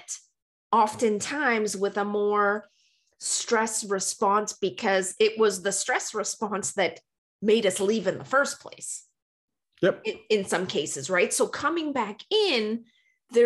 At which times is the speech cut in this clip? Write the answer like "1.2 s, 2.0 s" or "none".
none